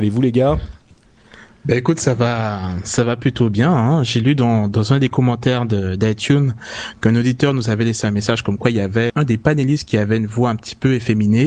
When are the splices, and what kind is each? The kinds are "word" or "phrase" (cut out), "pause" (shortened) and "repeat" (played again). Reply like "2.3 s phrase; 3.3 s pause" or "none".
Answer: 9.1 s word